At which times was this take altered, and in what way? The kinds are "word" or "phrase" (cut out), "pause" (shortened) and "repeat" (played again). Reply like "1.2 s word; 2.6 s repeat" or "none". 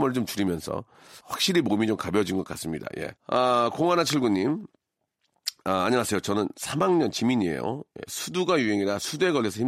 1.2 s phrase; 3.2 s pause